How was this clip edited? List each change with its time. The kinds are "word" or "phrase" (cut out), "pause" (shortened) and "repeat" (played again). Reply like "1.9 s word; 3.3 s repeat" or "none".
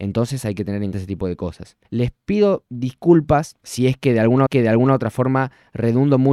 0.9 s word; 1.8 s pause; 3.6 s pause; 4.5 s repeat